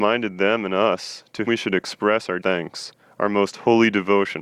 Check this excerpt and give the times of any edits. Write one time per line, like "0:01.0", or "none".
0:01.5
0:02.4